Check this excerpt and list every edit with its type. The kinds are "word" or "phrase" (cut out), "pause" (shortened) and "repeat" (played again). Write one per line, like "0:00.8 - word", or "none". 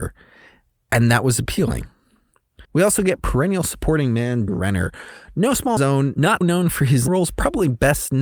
0:02.6 - pause
0:04.5 - word
0:05.8 - phrase
0:06.4 - word
0:07.1 - word